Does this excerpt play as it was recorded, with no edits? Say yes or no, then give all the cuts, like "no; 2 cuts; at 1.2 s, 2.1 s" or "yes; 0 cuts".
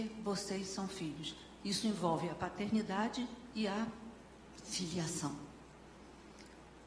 yes; 0 cuts